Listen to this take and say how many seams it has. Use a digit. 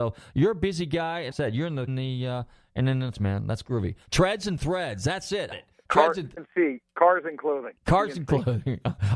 5